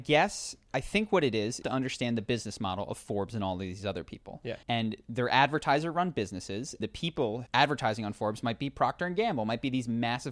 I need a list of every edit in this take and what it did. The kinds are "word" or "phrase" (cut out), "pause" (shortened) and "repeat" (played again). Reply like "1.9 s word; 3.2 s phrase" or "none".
1.6 s phrase; 4.6 s pause; 6.8 s word; 7.5 s phrase